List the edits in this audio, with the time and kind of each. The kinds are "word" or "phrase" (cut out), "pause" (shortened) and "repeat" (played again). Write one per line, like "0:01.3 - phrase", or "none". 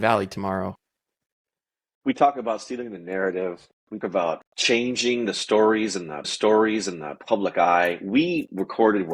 0:04.0 - word
0:04.5 - pause
0:06.2 - repeat